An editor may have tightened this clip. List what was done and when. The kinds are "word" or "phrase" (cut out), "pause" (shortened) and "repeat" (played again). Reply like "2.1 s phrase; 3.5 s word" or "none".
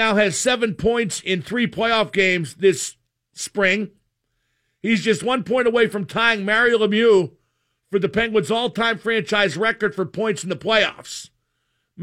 none